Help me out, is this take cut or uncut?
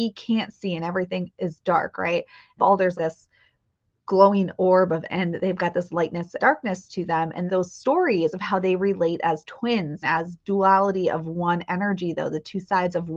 cut